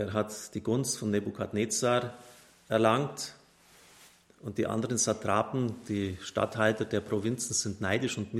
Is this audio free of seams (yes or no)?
yes